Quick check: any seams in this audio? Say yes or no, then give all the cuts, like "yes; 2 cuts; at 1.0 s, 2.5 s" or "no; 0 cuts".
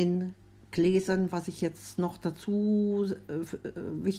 no; 0 cuts